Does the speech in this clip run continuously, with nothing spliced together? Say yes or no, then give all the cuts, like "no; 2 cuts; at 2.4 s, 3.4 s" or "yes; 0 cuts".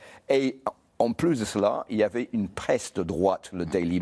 yes; 0 cuts